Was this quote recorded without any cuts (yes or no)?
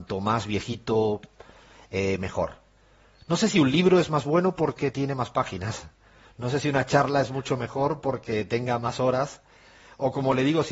yes